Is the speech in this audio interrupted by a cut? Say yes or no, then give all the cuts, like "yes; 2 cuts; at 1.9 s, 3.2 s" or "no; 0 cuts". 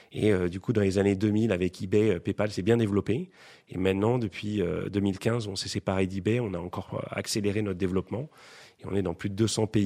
no; 0 cuts